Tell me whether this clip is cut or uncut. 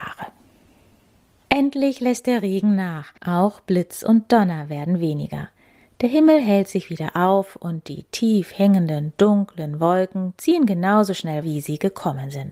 cut